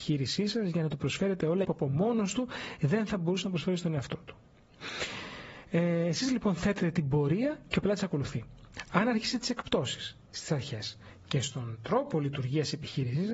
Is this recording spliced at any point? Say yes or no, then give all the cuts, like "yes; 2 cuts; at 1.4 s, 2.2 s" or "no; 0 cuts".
yes; 1 cut; at 1.6 s